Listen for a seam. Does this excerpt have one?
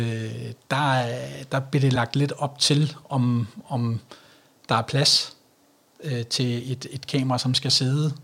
no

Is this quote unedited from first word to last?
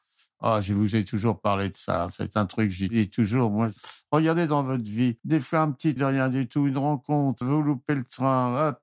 no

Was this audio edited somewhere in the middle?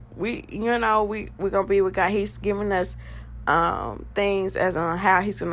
no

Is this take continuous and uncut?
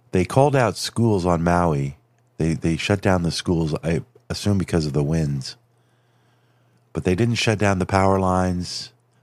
yes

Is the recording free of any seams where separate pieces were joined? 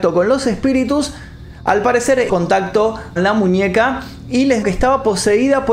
no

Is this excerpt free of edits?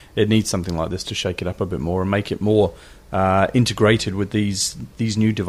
yes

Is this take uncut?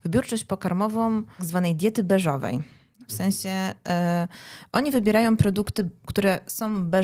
no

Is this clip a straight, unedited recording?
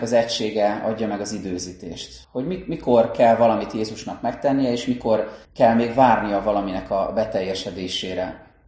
no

